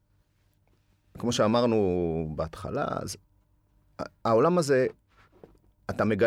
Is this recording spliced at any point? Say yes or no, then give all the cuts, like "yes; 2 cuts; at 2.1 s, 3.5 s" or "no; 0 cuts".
no; 0 cuts